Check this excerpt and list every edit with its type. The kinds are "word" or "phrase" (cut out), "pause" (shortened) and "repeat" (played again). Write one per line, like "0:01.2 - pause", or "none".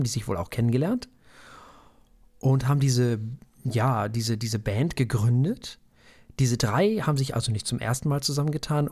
none

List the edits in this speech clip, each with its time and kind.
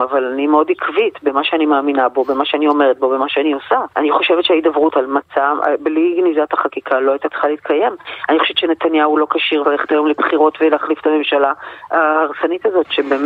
0:03.9 - pause
0:04.9 - word
0:09.6 - word

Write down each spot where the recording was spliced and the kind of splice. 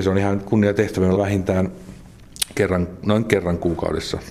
0:01.2 - word

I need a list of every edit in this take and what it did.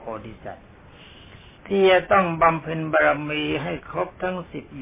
0:01.6 - pause

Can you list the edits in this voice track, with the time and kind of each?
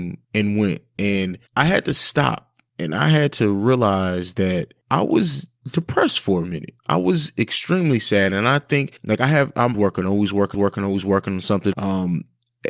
0:09.0 - pause
0:09.7 - word
0:10.5 - repeat

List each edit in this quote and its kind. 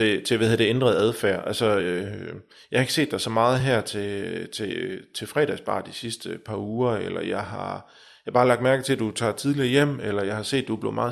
none

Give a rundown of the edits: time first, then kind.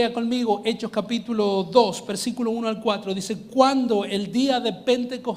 none

